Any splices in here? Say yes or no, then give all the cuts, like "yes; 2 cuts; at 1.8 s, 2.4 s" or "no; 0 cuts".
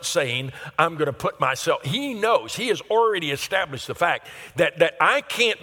no; 0 cuts